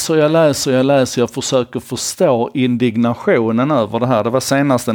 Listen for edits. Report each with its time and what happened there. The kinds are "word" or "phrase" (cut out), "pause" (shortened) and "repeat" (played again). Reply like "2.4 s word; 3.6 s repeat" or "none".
none